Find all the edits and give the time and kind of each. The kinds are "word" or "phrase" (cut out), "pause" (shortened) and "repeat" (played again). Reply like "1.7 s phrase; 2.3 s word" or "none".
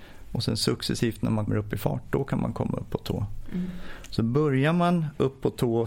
1.5 s word